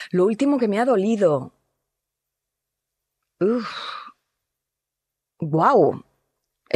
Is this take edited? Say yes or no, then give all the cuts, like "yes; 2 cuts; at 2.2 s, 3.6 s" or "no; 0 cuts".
no; 0 cuts